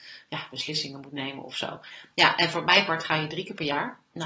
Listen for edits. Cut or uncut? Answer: uncut